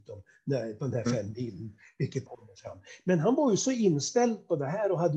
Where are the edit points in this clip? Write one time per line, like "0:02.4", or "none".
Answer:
0:02.3

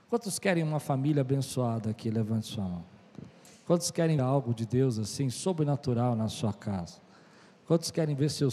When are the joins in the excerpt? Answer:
0:04.2

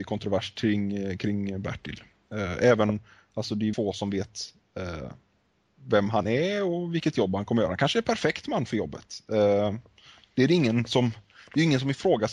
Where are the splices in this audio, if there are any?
0:03.7

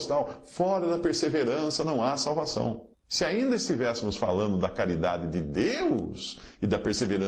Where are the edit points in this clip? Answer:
0:02.9

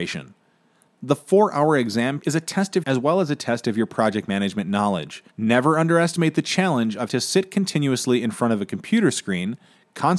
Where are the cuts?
0:02.2
0:02.8
0:05.3
0:07.1

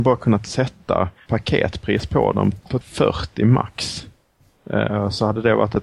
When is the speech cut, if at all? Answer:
0:01.3
0:02.8

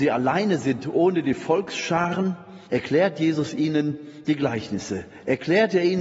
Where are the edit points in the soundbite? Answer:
0:02.7

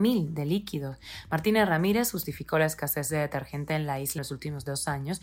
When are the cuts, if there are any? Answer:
0:04.2

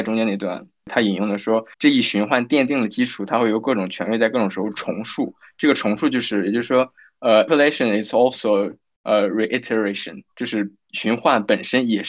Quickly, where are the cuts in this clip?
0:01.7
0:07.5

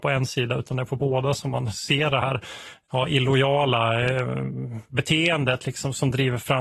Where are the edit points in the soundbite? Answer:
none

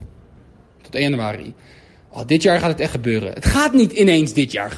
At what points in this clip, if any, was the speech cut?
none

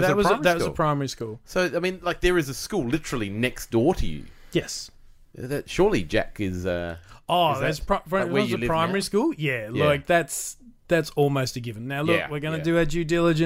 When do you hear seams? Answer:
none

